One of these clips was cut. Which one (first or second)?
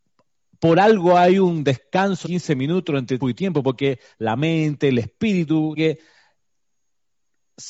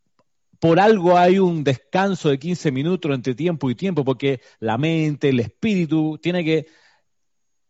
first